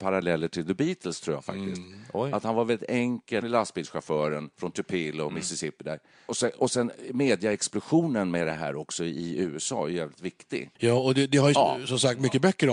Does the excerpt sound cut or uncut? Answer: cut